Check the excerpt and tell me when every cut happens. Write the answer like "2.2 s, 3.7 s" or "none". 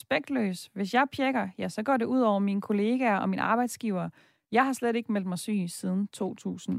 none

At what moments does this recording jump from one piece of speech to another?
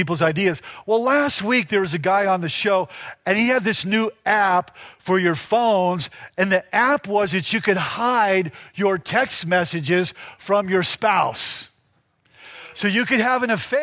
none

